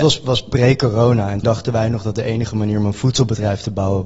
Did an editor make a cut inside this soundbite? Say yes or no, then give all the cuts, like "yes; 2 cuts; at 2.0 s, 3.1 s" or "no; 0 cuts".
yes; 1 cut; at 1.4 s